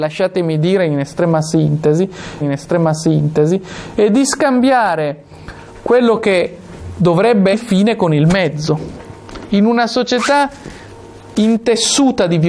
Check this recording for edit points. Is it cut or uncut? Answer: cut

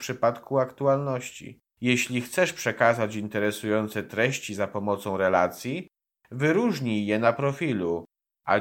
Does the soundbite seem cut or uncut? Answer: cut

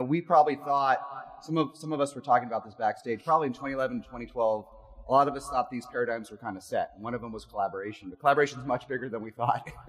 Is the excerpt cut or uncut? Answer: uncut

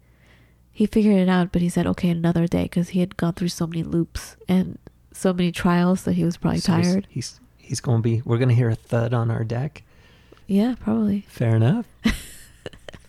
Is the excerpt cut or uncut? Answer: uncut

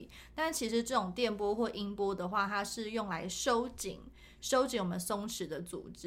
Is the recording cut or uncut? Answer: uncut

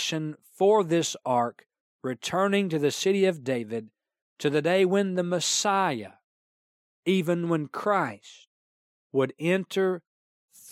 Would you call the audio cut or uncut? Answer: uncut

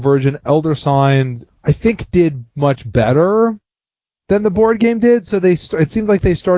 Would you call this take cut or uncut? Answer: cut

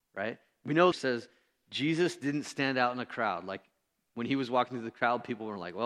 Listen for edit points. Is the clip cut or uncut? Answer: cut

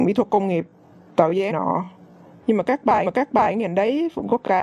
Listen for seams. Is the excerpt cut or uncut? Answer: cut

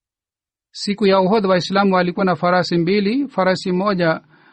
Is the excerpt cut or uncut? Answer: uncut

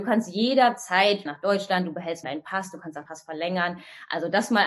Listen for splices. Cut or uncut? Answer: cut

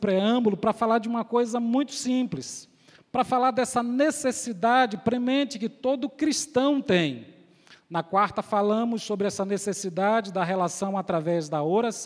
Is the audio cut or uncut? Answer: uncut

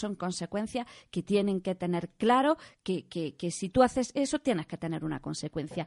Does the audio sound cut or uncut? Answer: uncut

